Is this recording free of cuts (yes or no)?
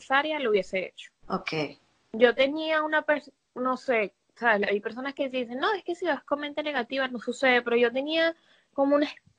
no